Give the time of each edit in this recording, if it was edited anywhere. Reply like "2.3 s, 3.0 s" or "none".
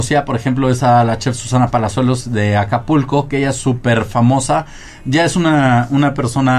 none